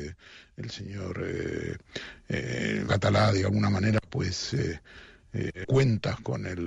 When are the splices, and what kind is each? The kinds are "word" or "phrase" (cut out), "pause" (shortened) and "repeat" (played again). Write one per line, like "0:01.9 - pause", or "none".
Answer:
0:02.9 - word
0:05.6 - word